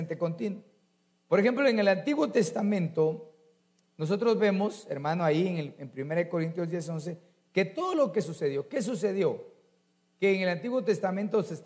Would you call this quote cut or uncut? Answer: uncut